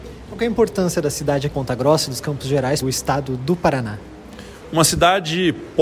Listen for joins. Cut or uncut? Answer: cut